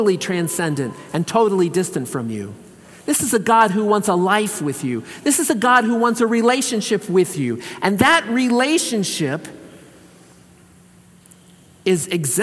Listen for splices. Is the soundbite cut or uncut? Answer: uncut